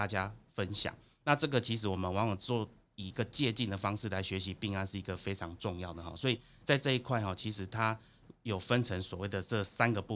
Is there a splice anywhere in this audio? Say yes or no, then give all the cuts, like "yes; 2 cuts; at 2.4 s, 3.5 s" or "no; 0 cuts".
no; 0 cuts